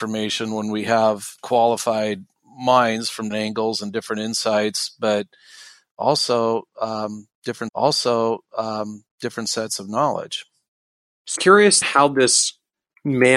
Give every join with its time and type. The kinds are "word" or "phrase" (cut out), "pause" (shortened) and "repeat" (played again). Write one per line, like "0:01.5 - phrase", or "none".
0:01.4 - pause
0:03.3 - word
0:07.7 - repeat
0:11.4 - word
0:11.8 - word